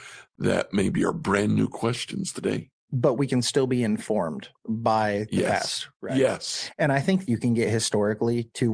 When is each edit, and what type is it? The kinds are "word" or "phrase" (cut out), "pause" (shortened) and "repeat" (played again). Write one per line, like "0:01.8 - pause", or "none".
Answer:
0:04.6 - pause
0:07.3 - phrase